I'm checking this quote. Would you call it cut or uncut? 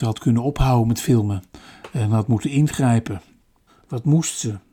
uncut